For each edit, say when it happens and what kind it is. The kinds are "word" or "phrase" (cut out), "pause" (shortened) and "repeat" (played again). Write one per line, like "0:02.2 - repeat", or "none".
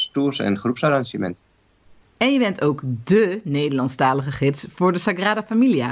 none